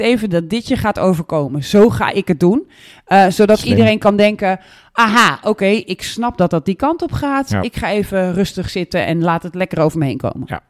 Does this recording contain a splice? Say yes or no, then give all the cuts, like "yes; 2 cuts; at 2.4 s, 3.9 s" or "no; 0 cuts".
no; 0 cuts